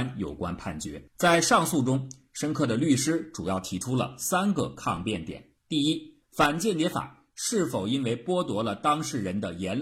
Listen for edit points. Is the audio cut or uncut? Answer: cut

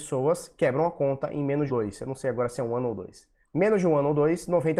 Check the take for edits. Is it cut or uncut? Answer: cut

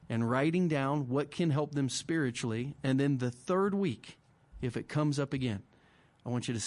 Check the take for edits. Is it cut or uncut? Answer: uncut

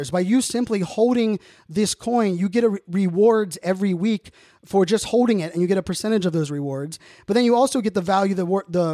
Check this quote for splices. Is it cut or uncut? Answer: uncut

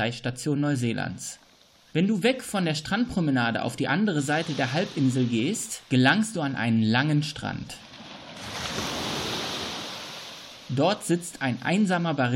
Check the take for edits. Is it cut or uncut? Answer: uncut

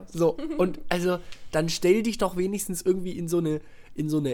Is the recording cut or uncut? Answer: uncut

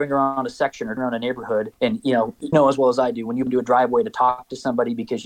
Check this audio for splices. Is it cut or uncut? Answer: cut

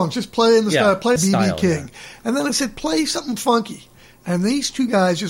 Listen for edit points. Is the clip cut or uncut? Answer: cut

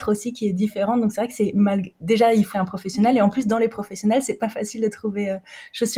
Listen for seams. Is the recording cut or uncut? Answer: cut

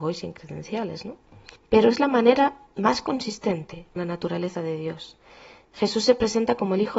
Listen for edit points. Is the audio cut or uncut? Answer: cut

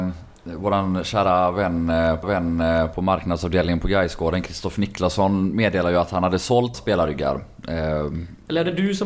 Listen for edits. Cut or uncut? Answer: cut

